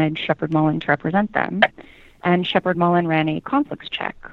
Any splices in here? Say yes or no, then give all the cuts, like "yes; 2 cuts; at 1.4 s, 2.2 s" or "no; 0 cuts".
no; 0 cuts